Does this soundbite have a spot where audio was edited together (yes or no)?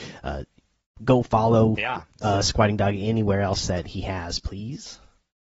no